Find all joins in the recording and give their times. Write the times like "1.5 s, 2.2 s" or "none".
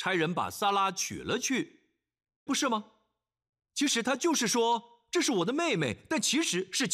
2.5 s